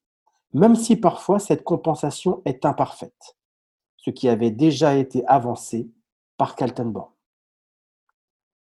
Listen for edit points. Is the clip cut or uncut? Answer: uncut